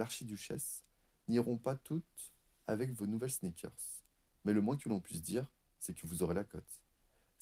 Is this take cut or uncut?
uncut